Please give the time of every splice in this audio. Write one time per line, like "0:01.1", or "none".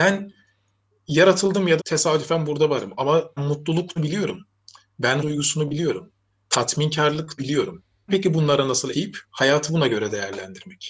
0:01.8
0:03.4
0:04.0
0:05.2
0:07.4
0:08.1
0:08.9